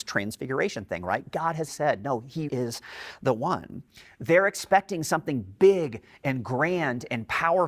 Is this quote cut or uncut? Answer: cut